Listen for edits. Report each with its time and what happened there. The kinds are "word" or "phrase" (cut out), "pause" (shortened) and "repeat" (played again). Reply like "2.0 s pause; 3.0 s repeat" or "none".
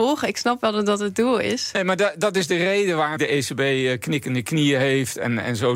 3.2 s word